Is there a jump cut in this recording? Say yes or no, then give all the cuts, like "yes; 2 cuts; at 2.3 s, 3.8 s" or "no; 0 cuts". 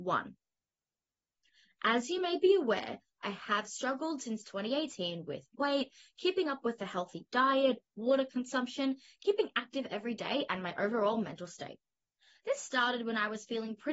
no; 0 cuts